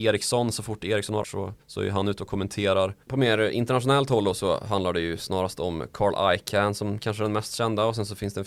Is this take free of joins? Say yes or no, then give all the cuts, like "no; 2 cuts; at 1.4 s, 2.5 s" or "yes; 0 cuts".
no; 3 cuts; at 1.2 s, 1.6 s, 3.0 s